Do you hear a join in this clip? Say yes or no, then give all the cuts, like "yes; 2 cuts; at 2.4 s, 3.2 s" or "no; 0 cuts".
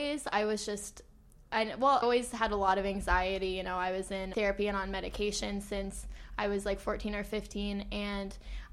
yes; 2 cuts; at 2.0 s, 4.3 s